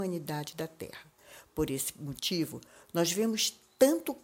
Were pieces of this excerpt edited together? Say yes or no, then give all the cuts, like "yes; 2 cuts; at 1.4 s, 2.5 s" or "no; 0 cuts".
no; 0 cuts